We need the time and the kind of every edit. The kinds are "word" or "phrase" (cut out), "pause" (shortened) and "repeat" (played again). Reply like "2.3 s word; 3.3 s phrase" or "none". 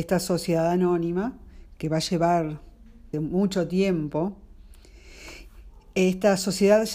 3.1 s word